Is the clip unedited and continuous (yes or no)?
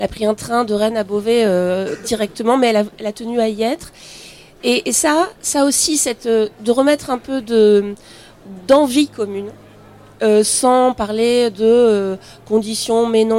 yes